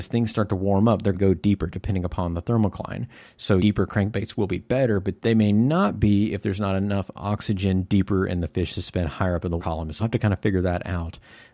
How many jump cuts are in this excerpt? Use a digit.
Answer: 5